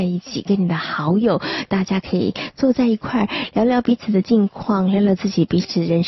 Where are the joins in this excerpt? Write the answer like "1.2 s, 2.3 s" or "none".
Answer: 1.7 s